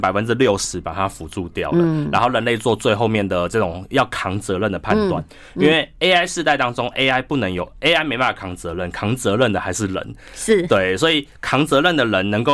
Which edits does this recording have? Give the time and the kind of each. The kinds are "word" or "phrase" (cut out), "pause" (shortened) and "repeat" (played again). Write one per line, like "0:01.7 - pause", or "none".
none